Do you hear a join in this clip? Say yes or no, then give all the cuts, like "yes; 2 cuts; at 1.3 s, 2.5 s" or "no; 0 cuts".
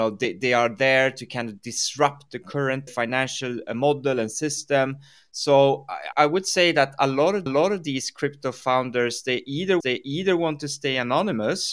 yes; 4 cuts; at 2.9 s, 6.1 s, 7.5 s, 9.8 s